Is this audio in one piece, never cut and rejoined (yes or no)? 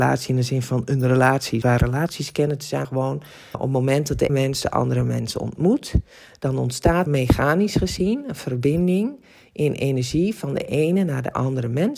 no